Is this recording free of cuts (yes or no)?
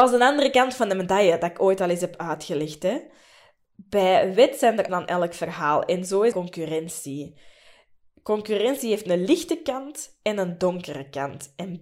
no